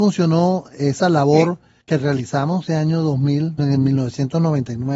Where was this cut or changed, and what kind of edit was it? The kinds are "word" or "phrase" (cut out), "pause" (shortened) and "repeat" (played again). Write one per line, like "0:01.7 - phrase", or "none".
0:01.8 - pause
0:02.7 - phrase
0:03.6 - word